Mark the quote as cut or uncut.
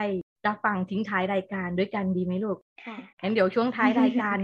cut